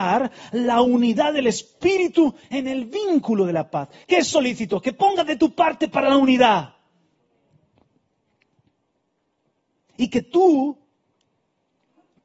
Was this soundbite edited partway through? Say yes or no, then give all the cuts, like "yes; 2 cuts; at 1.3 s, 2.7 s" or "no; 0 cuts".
no; 0 cuts